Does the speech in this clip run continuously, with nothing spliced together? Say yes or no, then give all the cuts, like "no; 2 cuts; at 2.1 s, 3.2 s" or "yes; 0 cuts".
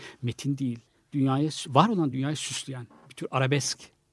yes; 0 cuts